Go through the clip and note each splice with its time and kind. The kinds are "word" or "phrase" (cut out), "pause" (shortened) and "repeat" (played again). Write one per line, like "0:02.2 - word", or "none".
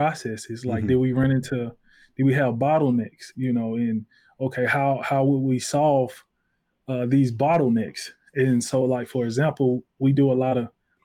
none